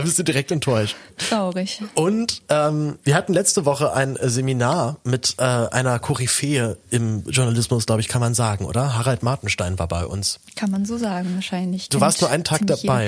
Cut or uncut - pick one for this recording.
uncut